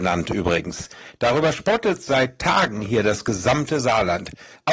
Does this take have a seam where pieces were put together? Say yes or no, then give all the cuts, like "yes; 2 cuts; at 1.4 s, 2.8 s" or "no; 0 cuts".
no; 0 cuts